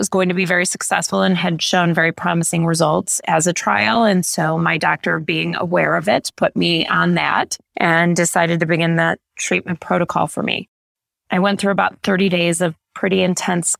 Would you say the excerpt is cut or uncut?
cut